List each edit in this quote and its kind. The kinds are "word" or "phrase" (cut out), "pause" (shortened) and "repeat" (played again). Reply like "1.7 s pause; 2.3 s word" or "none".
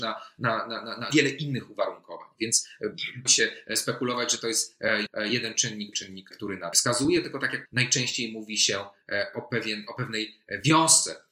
1.1 s word; 3.3 s word; 5.1 s word; 5.9 s word; 6.3 s word; 6.7 s word; 7.7 s word; 9.3 s word